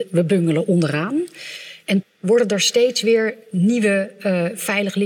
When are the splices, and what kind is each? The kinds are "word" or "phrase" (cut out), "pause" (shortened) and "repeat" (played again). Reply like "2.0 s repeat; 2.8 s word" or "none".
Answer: 2.0 s word